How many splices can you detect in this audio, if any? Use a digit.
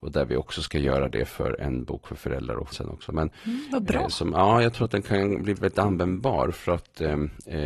2